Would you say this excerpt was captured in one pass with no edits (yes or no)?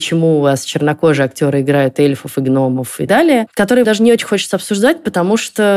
no